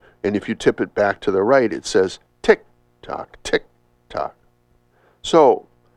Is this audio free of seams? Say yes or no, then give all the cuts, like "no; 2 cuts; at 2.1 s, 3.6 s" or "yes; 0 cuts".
yes; 0 cuts